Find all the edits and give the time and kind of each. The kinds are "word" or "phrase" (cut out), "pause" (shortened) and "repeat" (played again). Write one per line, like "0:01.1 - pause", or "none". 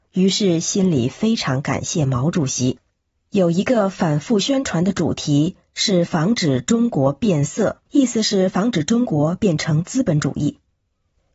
0:03.0 - pause
0:07.9 - pause